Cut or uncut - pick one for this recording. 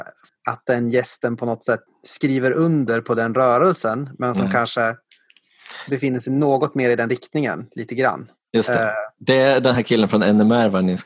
uncut